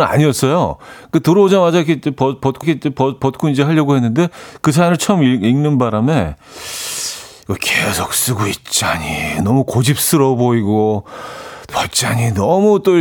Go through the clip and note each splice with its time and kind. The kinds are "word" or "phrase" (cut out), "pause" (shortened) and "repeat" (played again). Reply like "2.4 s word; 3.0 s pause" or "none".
2.6 s repeat; 11.7 s word